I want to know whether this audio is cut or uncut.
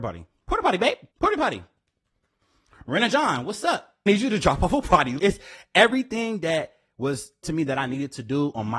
cut